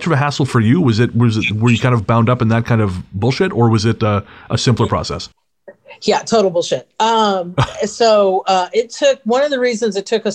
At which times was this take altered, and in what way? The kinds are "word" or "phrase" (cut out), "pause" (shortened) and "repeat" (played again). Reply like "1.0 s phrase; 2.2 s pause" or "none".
none